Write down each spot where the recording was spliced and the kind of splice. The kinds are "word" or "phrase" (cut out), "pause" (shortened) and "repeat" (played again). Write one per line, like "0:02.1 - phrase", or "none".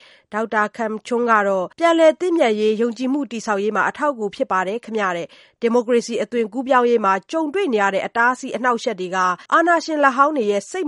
0:01.7 - pause
0:09.5 - pause